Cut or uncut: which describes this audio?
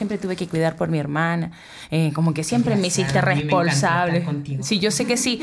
uncut